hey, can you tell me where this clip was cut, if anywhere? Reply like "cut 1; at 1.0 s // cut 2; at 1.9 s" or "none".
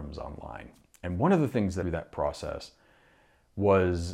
cut 1; at 1.8 s